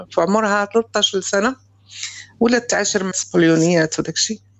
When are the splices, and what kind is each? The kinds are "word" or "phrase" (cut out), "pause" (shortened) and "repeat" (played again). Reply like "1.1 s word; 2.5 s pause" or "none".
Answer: 3.1 s word